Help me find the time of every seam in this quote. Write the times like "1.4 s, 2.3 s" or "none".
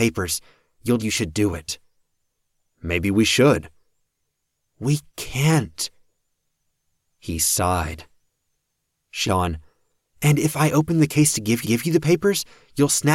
1.0 s, 9.2 s, 11.6 s